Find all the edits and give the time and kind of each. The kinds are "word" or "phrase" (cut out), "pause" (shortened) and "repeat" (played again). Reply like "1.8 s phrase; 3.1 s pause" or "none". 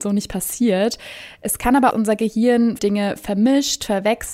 1.9 s phrase; 2.8 s word